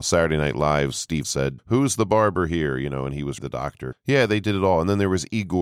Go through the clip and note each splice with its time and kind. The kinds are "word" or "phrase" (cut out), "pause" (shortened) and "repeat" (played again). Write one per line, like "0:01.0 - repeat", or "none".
0:01.2 - word
0:01.6 - word
0:03.4 - word
0:03.9 - word